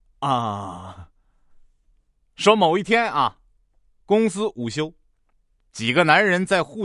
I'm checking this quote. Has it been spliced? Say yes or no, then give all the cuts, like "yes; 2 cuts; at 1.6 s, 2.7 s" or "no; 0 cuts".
no; 0 cuts